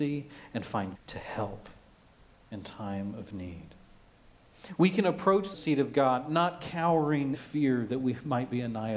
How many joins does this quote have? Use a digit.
3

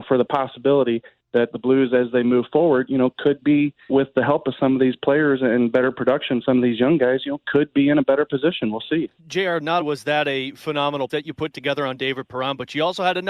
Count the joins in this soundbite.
6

